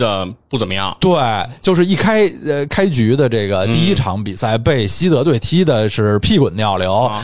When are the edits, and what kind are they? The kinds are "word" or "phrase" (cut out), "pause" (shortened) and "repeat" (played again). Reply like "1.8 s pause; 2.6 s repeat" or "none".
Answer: none